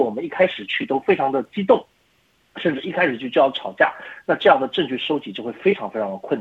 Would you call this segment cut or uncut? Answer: uncut